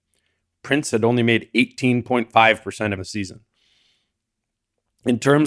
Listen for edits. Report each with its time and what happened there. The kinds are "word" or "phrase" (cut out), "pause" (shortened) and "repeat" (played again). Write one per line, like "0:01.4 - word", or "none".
0:03.0 - phrase